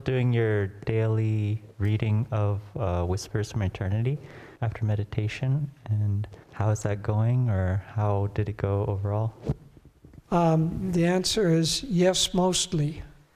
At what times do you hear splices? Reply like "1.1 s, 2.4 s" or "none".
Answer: 4.6 s, 6.4 s, 10.2 s